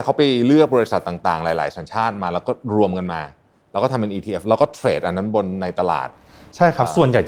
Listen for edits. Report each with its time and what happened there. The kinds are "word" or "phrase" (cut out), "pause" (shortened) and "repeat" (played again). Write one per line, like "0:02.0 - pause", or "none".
none